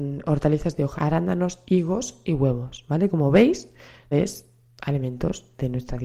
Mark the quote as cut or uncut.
cut